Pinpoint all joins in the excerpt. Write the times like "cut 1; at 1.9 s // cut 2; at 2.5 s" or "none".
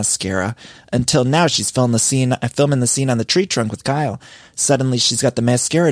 none